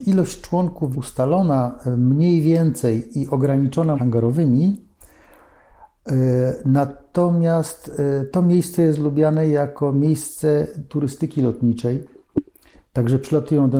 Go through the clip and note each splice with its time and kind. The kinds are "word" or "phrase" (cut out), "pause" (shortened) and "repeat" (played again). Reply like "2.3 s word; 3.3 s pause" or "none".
0.9 s phrase; 3.9 s word

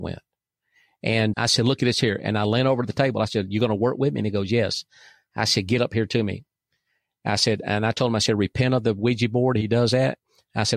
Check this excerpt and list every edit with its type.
1.3 s word

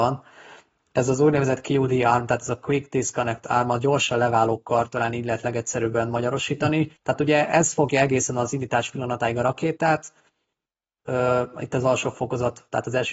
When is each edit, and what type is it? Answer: 7.0 s pause

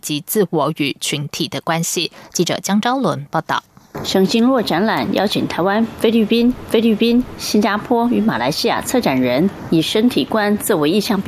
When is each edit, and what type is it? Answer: 6.7 s repeat

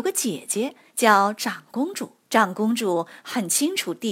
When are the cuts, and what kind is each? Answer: 2.2 s pause

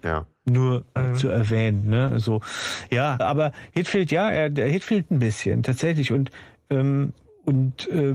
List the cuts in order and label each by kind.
1.0 s phrase; 3.2 s word; 5.1 s word

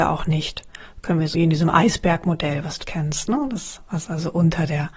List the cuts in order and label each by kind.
1.3 s word; 2.8 s word

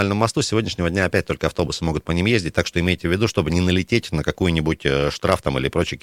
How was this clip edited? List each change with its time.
none

